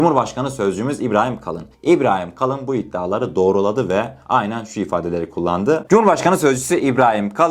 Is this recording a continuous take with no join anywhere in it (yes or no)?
no